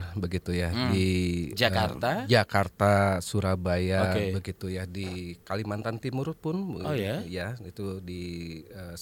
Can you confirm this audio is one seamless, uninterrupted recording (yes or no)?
yes